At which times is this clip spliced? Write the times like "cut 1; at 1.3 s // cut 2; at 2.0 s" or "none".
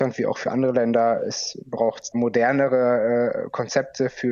cut 1; at 2.1 s

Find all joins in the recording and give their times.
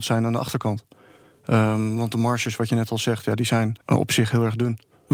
cut 1; at 3.8 s

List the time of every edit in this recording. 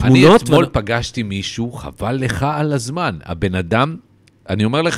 none

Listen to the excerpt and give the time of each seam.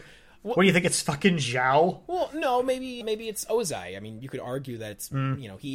cut 1; at 3.0 s

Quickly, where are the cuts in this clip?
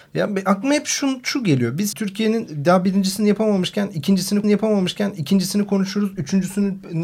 cut 1; at 1.9 s // cut 2; at 4.4 s

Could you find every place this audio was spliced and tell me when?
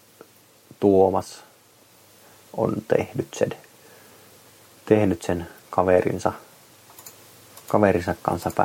none

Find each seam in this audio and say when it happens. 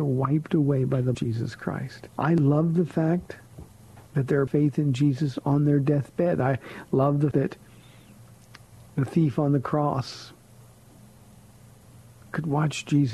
cut 1; at 1.1 s // cut 2; at 2.1 s // cut 3; at 4.1 s // cut 4; at 4.5 s // cut 5; at 7.3 s

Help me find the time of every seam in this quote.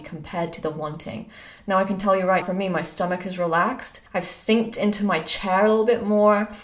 cut 1; at 2.4 s // cut 2; at 4.1 s

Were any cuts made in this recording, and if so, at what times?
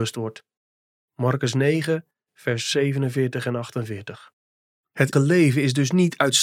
cut 1; at 5.1 s

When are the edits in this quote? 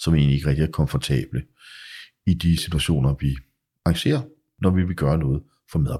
cut 1; at 2.6 s // cut 2; at 3.8 s

